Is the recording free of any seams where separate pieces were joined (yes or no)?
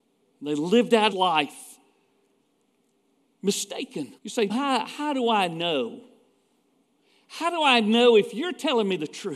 no